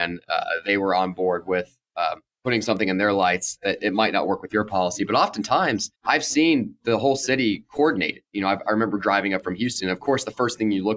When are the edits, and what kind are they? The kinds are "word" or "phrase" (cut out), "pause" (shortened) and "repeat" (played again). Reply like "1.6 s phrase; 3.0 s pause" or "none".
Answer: 2.3 s pause; 6.0 s pause